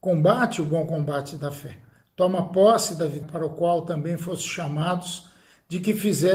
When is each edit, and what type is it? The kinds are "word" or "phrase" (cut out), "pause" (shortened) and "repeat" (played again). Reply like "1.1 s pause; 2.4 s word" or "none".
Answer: 3.2 s word